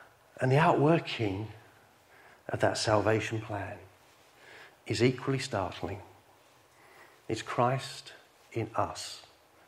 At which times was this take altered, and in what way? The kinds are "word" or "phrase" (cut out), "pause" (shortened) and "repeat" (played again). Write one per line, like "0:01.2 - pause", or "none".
none